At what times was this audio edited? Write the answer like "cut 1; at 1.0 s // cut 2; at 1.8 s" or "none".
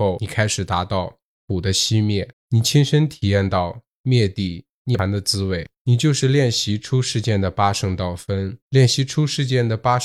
cut 1; at 2.3 s // cut 2; at 8.6 s